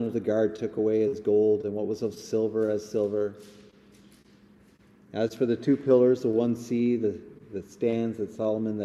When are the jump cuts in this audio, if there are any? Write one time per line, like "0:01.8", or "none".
none